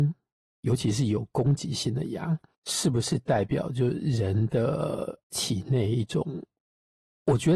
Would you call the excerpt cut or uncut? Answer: cut